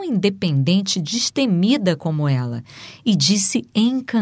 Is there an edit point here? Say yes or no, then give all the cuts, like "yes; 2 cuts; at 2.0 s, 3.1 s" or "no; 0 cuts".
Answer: no; 0 cuts